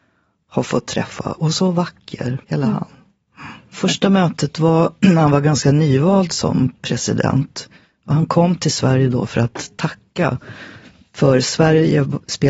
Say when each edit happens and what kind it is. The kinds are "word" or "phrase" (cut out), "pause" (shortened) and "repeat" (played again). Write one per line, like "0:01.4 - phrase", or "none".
0:02.4 - pause